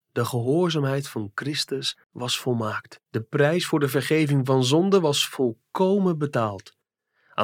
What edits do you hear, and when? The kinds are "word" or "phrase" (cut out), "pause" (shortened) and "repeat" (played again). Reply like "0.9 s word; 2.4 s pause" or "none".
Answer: 2.0 s pause; 3.0 s pause